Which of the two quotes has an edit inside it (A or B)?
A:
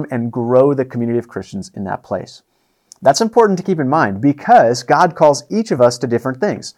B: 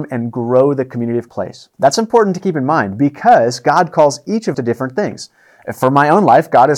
B